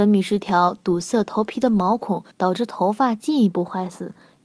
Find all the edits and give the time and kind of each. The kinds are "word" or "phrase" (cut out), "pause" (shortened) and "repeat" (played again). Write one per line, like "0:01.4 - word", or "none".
0:02.3 - pause